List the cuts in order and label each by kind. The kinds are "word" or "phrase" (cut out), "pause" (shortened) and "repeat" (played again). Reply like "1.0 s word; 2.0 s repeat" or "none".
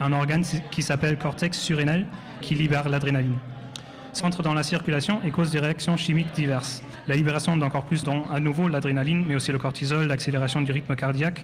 2.4 s word; 4.2 s word; 8.0 s word